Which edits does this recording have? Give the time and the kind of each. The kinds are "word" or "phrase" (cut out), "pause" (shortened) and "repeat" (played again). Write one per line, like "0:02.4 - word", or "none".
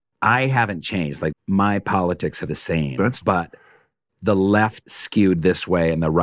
0:01.3 - word
0:02.5 - word
0:03.2 - word
0:04.8 - word